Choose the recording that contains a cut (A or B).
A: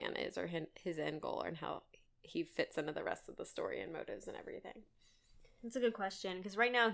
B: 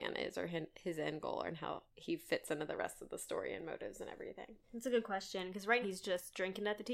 B